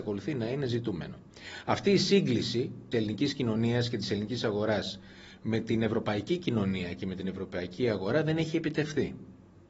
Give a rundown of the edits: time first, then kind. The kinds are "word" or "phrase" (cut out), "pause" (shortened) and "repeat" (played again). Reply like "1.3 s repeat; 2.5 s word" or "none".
2.9 s word